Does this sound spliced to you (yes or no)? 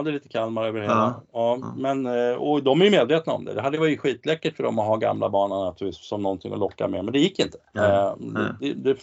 yes